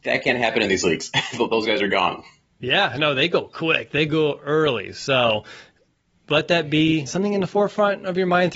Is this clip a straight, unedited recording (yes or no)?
no